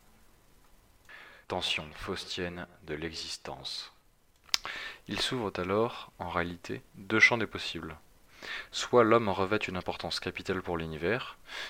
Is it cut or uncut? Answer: cut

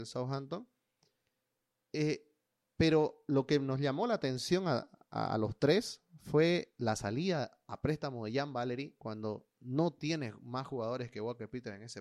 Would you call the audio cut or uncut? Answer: uncut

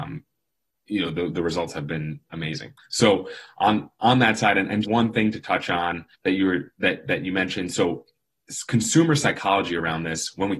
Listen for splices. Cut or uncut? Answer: cut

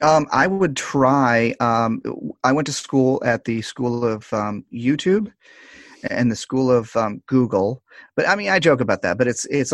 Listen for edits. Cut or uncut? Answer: uncut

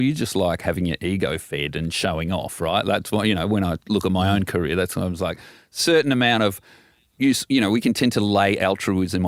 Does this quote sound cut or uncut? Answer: uncut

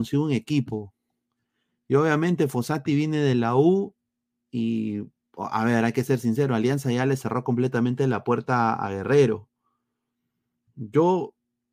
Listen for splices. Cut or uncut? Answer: uncut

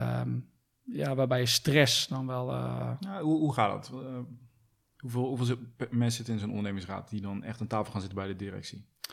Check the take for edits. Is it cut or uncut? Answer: uncut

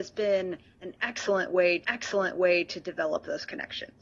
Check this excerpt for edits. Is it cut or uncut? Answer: cut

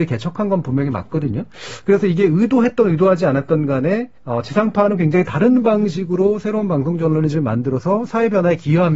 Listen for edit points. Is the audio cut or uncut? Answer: cut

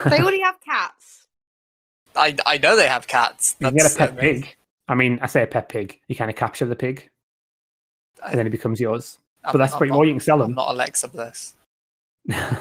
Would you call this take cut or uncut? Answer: cut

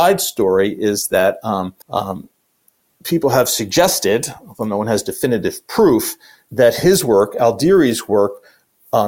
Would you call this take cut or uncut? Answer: cut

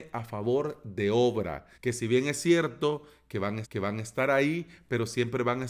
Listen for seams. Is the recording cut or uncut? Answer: cut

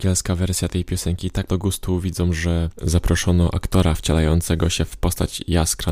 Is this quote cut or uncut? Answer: cut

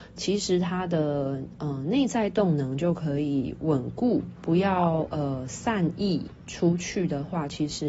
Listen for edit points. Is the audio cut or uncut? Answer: cut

